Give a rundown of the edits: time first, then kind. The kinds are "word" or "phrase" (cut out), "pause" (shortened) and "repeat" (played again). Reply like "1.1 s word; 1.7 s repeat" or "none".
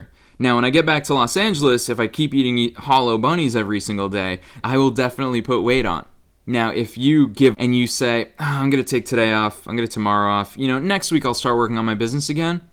4.6 s phrase; 6.2 s pause; 7.5 s phrase; 9.9 s word